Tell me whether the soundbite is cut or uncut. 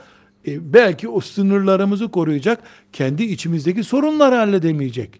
uncut